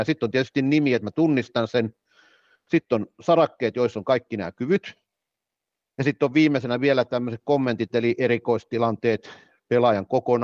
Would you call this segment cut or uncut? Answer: uncut